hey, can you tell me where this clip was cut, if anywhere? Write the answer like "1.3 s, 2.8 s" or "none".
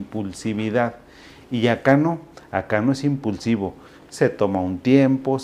none